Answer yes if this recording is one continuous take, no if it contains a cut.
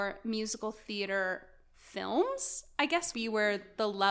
no